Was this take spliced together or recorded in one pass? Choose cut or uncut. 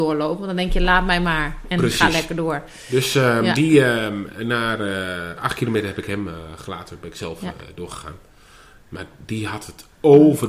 uncut